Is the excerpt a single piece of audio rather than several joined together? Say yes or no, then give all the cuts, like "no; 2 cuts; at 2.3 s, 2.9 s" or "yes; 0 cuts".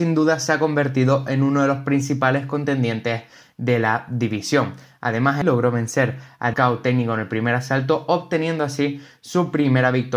no; 2 cuts; at 5.4 s, 6.5 s